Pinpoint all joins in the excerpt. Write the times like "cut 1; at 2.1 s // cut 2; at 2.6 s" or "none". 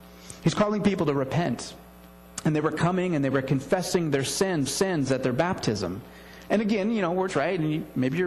cut 1; at 4.7 s // cut 2; at 7.3 s